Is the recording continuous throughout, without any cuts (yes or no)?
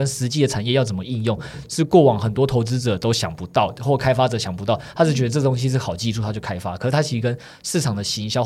yes